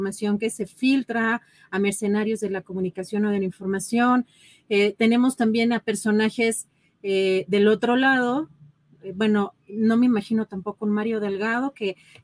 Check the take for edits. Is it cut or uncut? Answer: uncut